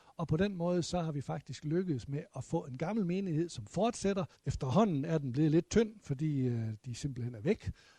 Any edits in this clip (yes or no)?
yes